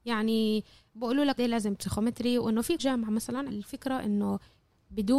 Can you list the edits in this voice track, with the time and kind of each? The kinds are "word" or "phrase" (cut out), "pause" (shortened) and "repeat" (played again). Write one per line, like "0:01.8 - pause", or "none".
0:01.4 - word
0:02.8 - word
0:03.5 - word